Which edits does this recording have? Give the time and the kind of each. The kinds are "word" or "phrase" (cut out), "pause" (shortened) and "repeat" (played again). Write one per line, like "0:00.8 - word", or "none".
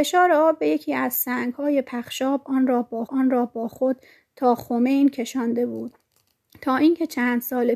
0:03.1 - repeat